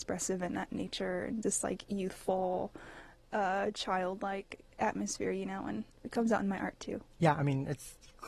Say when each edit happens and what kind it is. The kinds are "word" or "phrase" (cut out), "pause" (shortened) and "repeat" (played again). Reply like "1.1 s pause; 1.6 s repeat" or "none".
1.4 s word